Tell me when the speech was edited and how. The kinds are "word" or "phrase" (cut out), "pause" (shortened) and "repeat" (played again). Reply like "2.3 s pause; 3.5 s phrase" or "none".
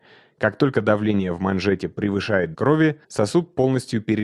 2.5 s word; 3.0 s pause

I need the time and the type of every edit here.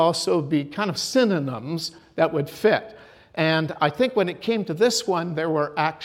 none

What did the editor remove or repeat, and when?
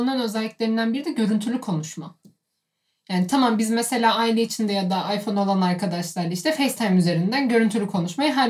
none

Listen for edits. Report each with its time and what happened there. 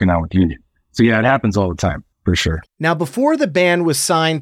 2.1 s pause; 2.7 s pause

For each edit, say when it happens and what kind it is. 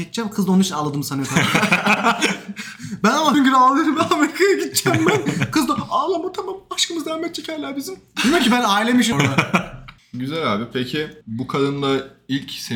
3.3 s word; 9.1 s word

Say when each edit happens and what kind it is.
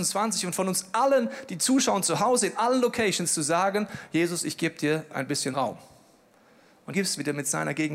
5.5 s word; 6.9 s phrase

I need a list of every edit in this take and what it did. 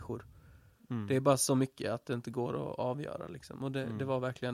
none

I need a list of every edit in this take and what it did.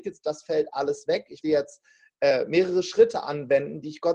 1.4 s word

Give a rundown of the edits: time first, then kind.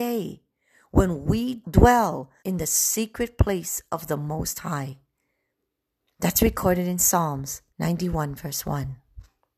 1.6 s word; 2.4 s pause; 7.7 s pause

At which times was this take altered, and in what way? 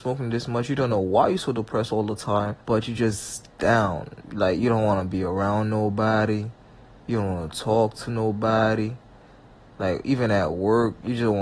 2.6 s pause; 4.2 s pause

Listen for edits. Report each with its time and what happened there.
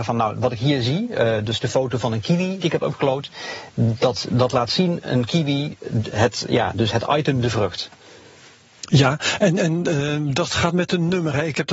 2.6 s phrase

